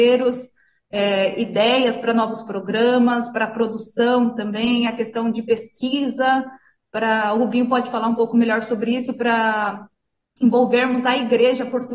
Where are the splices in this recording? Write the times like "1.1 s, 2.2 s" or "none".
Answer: none